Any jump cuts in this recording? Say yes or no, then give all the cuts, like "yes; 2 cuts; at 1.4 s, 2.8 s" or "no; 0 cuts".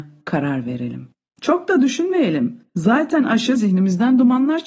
yes; 3 cuts; at 1.1 s, 2.7 s, 3.5 s